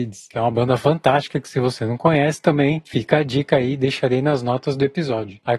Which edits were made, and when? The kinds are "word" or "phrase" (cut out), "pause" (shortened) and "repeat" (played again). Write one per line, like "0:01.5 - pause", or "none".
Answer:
none